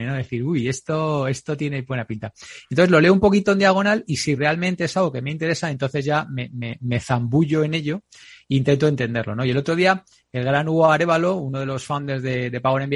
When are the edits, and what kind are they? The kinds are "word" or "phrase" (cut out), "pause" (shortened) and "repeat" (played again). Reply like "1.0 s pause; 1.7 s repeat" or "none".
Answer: none